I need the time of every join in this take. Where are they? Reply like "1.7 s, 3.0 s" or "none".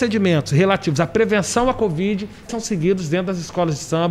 2.5 s

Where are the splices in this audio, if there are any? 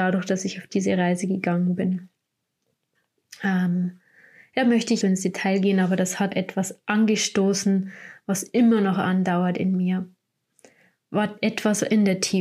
5.0 s, 6.3 s

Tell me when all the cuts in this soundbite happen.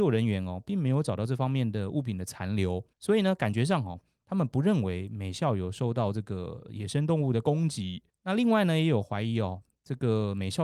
2.9 s, 8.1 s

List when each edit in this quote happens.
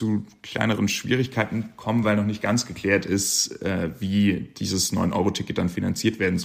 none

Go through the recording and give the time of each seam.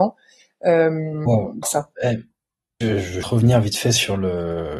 1.6 s, 2.8 s, 3.2 s

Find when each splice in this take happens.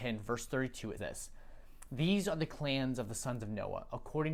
1.0 s

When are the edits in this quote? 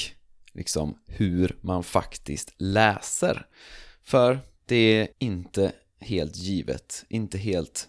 5.1 s

